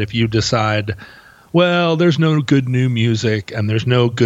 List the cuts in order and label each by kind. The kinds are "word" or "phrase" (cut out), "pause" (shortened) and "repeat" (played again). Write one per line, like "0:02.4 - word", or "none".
none